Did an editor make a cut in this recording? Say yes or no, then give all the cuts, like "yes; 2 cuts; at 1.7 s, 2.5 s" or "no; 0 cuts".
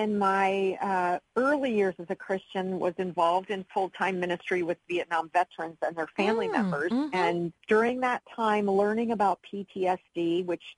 yes; 1 cut; at 7.6 s